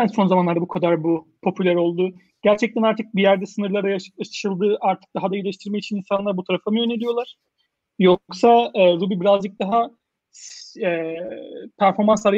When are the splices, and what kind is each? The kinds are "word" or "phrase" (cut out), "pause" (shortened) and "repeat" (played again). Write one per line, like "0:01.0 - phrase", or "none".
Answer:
none